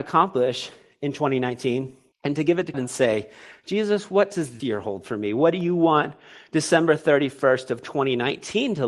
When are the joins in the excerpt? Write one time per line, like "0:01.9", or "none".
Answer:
0:02.1
0:02.7
0:04.6